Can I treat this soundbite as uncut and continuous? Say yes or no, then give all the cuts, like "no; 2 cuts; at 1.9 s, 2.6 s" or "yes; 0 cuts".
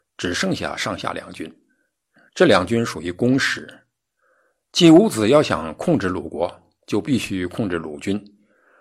yes; 0 cuts